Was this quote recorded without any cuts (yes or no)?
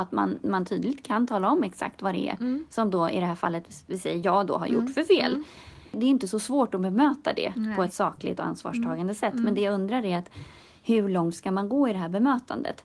yes